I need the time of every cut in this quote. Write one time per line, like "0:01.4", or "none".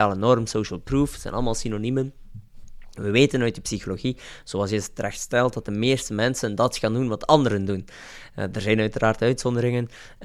none